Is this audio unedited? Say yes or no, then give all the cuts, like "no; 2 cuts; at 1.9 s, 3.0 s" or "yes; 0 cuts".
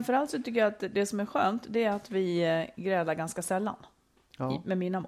yes; 0 cuts